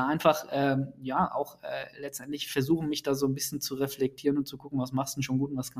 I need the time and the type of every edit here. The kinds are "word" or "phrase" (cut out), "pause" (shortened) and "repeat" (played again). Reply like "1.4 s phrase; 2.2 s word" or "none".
none